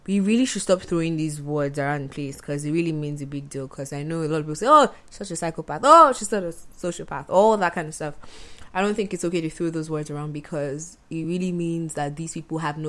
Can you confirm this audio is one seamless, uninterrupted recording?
yes; 0 cuts

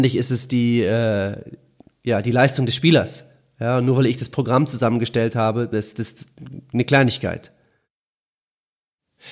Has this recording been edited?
no; 0 cuts

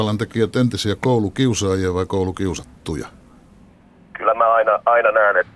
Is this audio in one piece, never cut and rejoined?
yes; 0 cuts

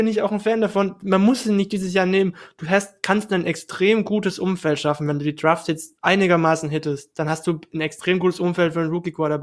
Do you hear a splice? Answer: yes; 1 cut; at 6.0 s

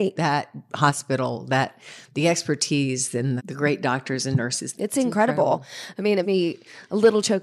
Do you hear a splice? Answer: yes; 3 cuts; at 3.4 s, 4.7 s, 6.2 s

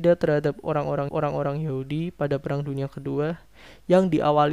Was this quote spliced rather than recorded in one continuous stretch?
yes; 1 cut; at 1.1 s

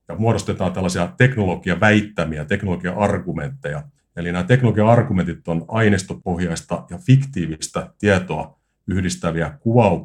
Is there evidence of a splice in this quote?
yes; 1 cut; at 4.0 s

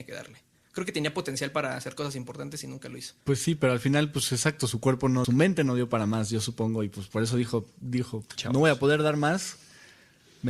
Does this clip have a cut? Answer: yes; 3 cuts; at 3.2 s, 5.2 s, 8.4 s

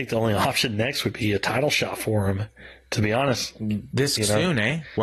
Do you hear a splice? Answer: no; 0 cuts

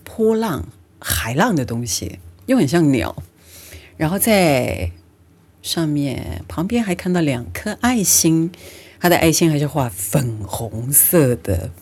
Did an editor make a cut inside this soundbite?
no; 0 cuts

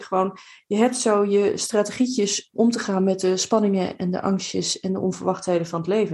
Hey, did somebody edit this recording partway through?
yes; 1 cut; at 2.5 s

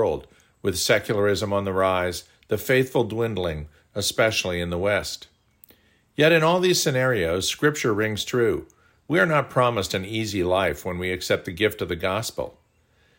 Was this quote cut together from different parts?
no; 0 cuts

